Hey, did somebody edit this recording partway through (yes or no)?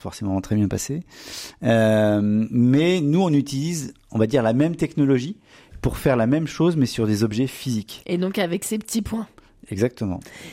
no